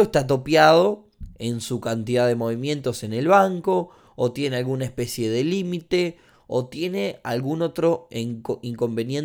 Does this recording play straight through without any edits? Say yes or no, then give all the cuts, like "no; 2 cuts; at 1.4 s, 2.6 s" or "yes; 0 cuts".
yes; 0 cuts